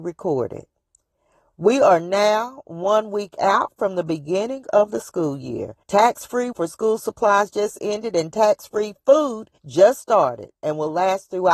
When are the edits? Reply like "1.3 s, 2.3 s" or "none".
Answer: 5.8 s, 6.5 s, 9.6 s